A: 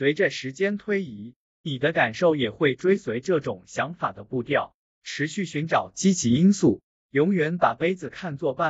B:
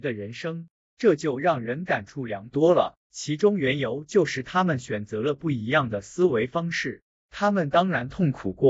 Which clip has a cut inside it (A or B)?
B